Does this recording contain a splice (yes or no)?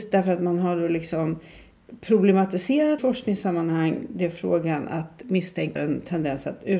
yes